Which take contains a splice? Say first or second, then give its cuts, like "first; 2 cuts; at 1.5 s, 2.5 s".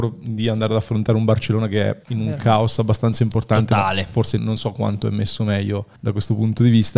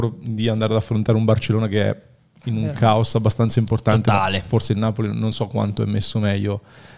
first; 3 cuts; at 2.0 s, 4.4 s, 6.0 s